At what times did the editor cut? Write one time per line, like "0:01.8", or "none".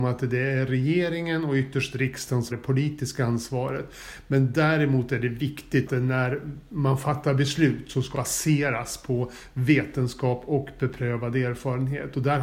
0:02.5
0:05.9
0:08.1